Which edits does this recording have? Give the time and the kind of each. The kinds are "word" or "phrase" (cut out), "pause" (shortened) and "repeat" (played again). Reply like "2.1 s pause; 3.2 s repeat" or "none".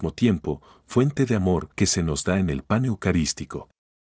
1.7 s pause